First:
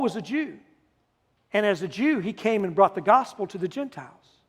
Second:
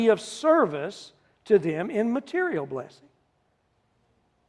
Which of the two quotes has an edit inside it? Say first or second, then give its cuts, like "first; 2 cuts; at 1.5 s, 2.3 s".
first; 1 cut; at 1.0 s